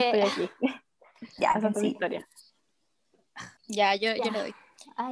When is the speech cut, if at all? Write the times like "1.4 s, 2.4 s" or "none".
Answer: 3.6 s